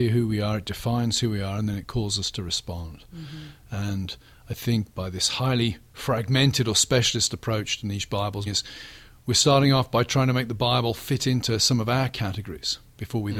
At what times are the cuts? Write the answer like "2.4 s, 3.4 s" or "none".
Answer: 4.9 s, 8.5 s